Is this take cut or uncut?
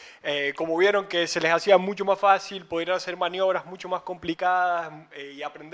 uncut